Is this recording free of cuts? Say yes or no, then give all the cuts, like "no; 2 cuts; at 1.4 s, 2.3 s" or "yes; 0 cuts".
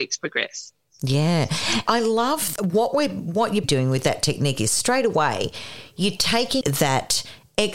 no; 4 cuts; at 1.9 s, 2.6 s, 3.6 s, 6.6 s